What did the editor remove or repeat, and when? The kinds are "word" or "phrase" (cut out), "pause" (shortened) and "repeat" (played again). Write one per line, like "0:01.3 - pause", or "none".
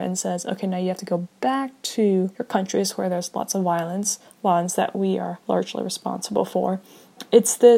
0:02.3 - pause
0:05.4 - pause